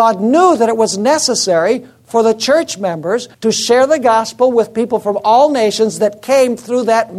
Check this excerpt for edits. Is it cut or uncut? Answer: cut